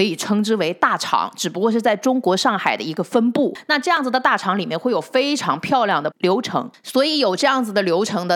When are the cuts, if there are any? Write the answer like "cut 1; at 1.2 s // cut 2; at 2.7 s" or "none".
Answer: cut 1; at 6.1 s